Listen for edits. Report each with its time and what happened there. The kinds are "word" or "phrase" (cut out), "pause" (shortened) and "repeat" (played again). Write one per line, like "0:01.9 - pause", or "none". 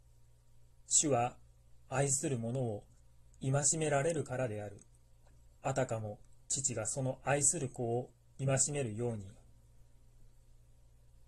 0:05.6 - pause
0:06.4 - pause